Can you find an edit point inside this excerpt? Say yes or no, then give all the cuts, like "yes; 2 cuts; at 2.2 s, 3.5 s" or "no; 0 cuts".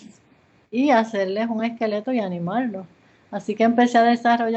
no; 0 cuts